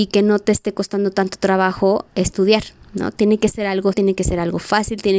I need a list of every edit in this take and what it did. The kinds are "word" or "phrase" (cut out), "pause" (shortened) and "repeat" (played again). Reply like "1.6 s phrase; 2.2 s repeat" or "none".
3.9 s word